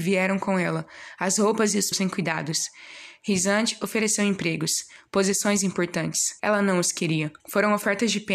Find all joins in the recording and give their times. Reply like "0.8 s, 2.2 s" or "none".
1.9 s, 6.4 s, 7.4 s

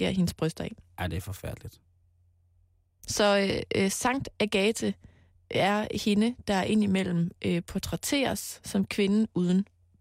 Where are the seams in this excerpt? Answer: none

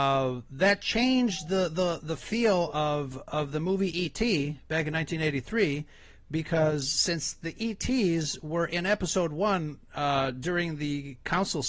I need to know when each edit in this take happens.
2.0 s

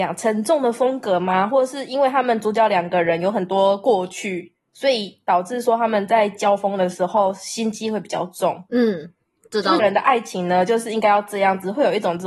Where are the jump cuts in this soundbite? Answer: 4.6 s, 8.7 s, 9.8 s

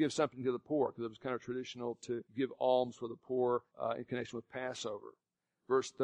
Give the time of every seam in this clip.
2.3 s, 3.7 s

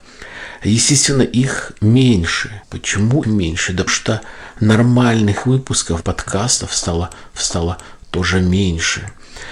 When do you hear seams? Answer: 2.6 s, 3.2 s, 3.9 s, 6.0 s, 7.4 s

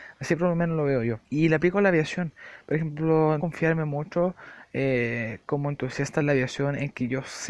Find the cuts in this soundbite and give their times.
1.2 s, 3.4 s

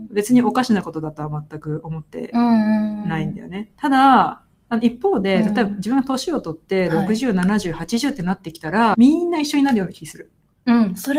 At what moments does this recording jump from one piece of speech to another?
8.9 s

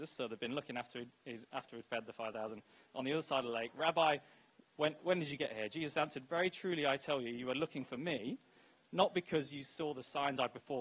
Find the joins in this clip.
none

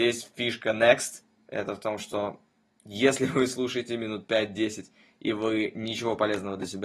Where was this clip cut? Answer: none

